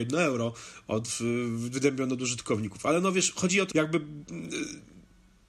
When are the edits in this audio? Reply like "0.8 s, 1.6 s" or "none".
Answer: 3.7 s